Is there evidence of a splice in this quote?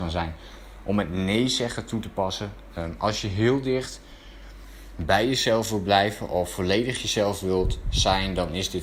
no; 0 cuts

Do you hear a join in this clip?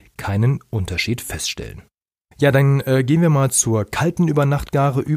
no; 0 cuts

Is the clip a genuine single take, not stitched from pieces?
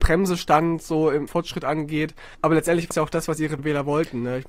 no; 4 cuts; at 1.3 s, 2.3 s, 2.9 s, 3.6 s

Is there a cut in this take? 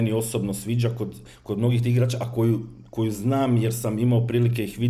no; 0 cuts

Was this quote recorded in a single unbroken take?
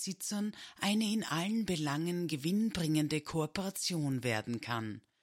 yes; 0 cuts

